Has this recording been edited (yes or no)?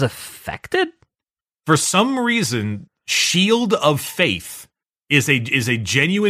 no